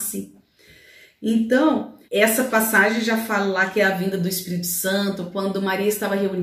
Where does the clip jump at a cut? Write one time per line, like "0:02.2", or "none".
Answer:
0:02.1